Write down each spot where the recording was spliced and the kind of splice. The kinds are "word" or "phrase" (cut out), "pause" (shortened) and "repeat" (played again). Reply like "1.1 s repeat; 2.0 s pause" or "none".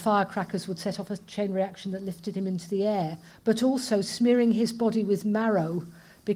3.3 s pause